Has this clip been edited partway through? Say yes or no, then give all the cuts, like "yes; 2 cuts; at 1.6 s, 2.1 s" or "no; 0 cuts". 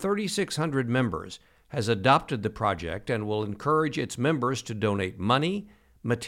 no; 0 cuts